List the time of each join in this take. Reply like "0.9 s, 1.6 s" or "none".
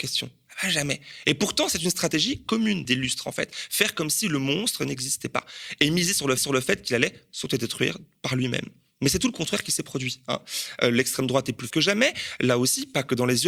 2.9 s, 6.4 s, 11.7 s